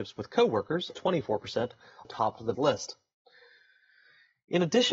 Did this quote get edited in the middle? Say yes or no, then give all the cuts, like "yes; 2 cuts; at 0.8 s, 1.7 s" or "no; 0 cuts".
yes; 3 cuts; at 0.9 s, 2.0 s, 2.5 s